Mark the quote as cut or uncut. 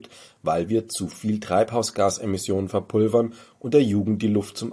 uncut